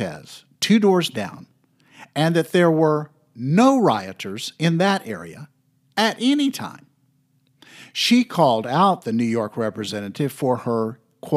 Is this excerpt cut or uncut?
uncut